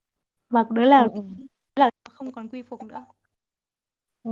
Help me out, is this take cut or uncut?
uncut